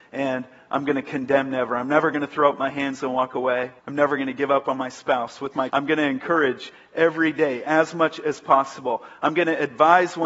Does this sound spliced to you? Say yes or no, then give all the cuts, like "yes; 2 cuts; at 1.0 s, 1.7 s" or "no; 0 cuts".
yes; 2 cuts; at 3.8 s, 5.7 s